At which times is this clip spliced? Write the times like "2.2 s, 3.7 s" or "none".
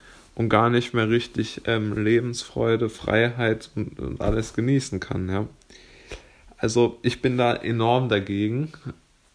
none